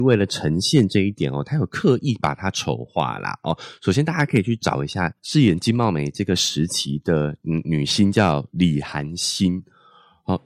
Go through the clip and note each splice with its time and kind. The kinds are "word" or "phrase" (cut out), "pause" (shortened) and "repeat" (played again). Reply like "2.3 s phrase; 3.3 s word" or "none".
5.2 s pause